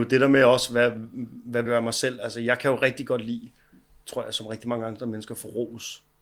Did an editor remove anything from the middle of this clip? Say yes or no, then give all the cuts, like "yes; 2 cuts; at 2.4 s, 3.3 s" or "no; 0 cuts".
yes; 1 cut; at 1.7 s